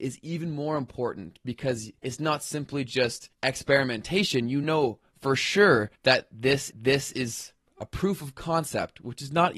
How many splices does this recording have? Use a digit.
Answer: 5